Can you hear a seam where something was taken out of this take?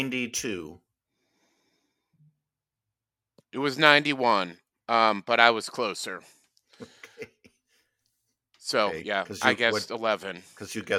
no; 0 cuts

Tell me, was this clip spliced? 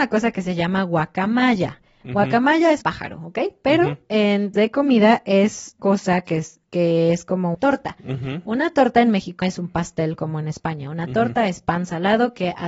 yes; 5 cuts; at 2.8 s, 4.5 s, 5.8 s, 7.5 s, 9.4 s

